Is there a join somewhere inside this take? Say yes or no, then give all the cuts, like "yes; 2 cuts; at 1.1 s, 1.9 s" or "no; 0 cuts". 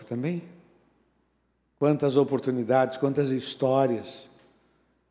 no; 0 cuts